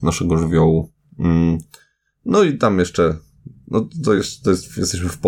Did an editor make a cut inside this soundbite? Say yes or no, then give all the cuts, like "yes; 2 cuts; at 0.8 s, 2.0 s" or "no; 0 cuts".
no; 0 cuts